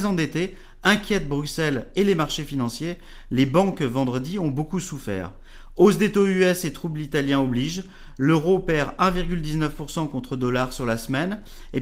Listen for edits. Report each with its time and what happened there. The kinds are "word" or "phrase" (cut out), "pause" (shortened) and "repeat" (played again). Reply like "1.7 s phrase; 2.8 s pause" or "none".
none